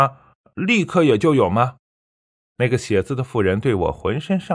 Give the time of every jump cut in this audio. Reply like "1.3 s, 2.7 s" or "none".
1.9 s